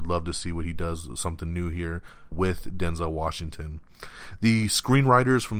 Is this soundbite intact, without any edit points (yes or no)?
no